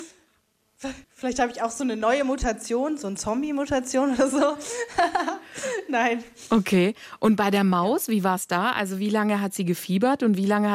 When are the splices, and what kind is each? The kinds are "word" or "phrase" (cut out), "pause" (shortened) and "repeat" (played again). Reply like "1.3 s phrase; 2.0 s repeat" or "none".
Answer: 1.0 s pause